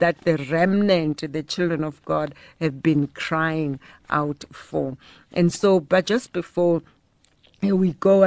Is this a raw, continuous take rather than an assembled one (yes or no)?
yes